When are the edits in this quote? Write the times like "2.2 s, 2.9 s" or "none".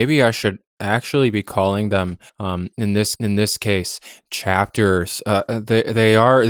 2.3 s, 3.2 s